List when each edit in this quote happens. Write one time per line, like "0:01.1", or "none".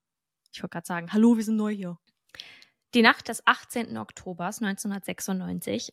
none